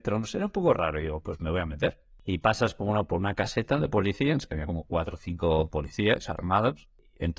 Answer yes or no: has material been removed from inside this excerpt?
no